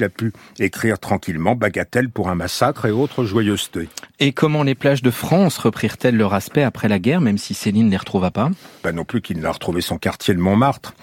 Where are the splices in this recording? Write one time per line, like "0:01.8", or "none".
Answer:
none